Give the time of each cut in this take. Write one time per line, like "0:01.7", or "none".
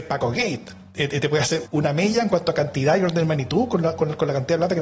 0:01.7